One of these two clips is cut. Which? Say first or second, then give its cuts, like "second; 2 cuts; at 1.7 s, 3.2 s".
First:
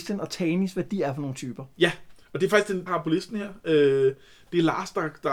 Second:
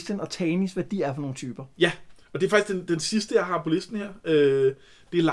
first; 1 cut; at 2.9 s